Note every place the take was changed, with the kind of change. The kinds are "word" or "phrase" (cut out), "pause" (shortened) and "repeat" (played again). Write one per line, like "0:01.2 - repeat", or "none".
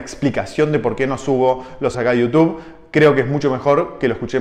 0:01.9 - word